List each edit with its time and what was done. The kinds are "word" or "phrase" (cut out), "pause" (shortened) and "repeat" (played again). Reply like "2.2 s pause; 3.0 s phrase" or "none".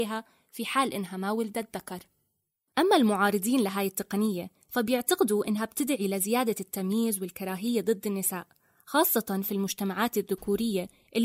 none